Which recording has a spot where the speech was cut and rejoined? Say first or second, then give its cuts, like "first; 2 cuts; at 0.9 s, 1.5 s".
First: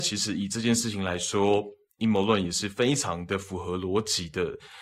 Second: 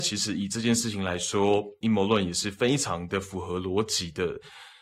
second; 1 cut; at 1.8 s